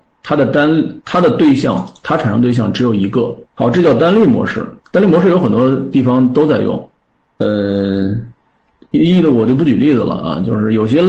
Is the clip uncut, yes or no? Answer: no